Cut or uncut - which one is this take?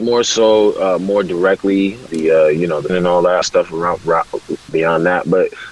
cut